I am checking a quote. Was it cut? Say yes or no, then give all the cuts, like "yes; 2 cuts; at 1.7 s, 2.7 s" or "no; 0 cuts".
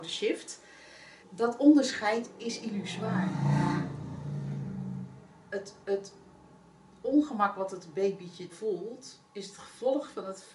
yes; 3 cuts; at 1.2 s, 5.8 s, 8.5 s